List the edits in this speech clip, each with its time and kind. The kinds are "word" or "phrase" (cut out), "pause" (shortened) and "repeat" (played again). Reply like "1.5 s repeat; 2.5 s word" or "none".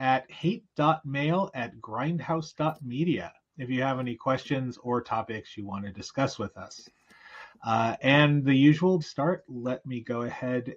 9.0 s phrase

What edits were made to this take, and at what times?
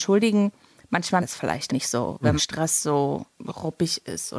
1.2 s phrase; 1.7 s word; 2.4 s phrase; 3.3 s pause

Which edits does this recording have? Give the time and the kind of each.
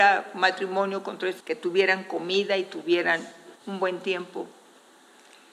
1.4 s word; 3.5 s pause

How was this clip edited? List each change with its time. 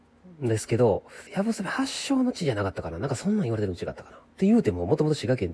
1.3 s pause; 4.3 s pause

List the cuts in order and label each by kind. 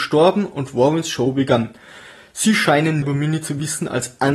3.0 s word

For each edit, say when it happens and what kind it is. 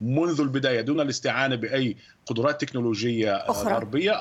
none

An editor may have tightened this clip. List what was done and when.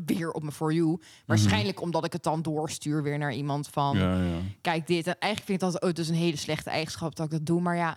none

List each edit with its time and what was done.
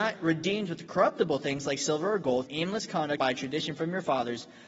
2.5 s phrase; 3.2 s word

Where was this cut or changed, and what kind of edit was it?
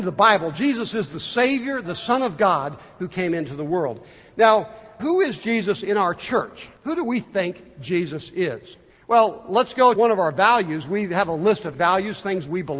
1.8 s word; 5.0 s word; 6.8 s pause; 8.9 s pause; 9.9 s word; 11.7 s word

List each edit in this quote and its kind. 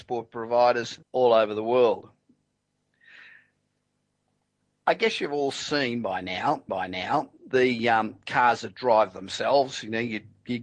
1.0 s pause; 6.7 s repeat

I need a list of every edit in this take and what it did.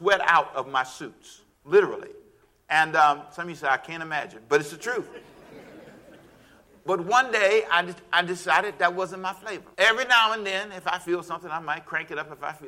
1.5 s pause; 9.7 s pause

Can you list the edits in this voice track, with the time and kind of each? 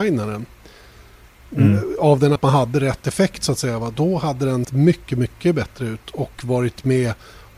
2.4 s word; 4.6 s word; 5.1 s word

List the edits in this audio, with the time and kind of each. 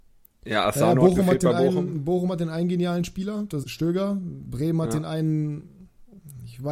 3.6 s word

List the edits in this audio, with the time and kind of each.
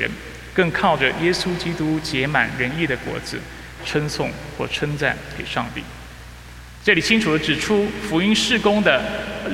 3.8 s phrase

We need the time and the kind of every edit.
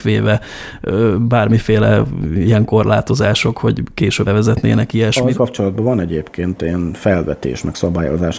4.3 s word; 5.3 s word

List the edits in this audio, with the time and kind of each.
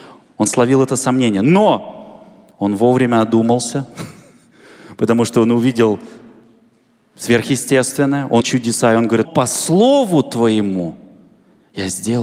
8.4 s word; 9.2 s word

